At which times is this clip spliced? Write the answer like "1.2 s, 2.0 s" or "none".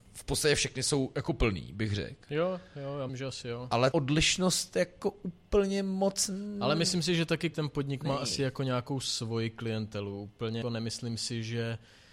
3.1 s, 3.9 s, 7.5 s, 10.6 s